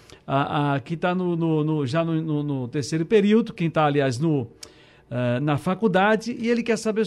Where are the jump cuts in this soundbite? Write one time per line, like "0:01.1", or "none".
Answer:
none